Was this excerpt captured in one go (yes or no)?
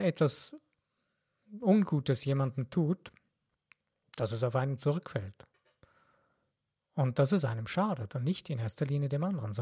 yes